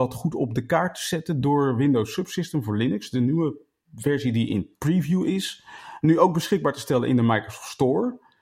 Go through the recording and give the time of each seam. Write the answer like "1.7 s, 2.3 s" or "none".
none